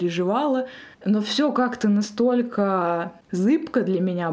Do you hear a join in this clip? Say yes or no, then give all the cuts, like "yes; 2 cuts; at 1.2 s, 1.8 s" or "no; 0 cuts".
yes; 1 cut; at 0.9 s